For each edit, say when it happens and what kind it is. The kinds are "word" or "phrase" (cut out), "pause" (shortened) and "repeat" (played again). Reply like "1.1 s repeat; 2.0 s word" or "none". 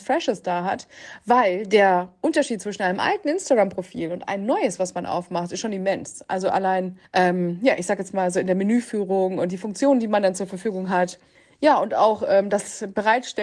7.0 s pause; 11.3 s pause